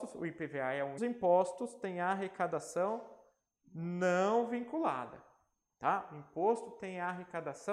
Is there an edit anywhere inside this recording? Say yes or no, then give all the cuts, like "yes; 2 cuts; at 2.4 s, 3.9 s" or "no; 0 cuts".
yes; 1 cut; at 1.0 s